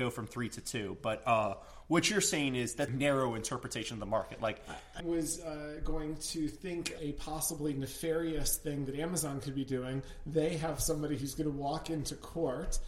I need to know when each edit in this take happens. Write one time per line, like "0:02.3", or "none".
0:02.9
0:05.0
0:07.0